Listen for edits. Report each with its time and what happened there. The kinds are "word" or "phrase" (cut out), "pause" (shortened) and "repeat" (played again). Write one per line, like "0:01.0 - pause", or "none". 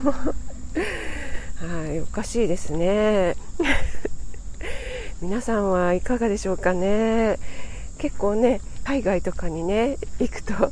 0:08.9 - phrase